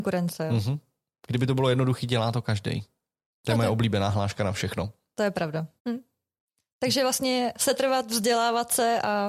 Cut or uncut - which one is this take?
cut